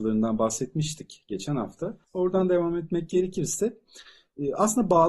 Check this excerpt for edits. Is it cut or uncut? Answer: cut